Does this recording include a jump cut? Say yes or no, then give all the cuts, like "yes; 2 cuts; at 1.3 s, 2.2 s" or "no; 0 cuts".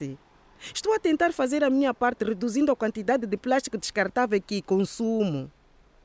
no; 0 cuts